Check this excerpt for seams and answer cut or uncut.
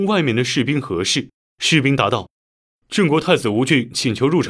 cut